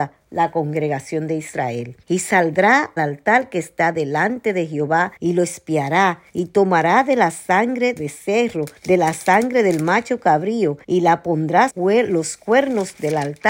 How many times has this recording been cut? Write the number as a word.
eight